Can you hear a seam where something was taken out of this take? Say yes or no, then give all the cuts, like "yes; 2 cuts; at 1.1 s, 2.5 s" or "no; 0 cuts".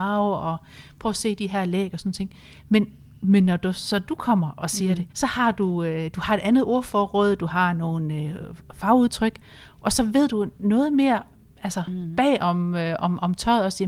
yes; 1 cut; at 5.1 s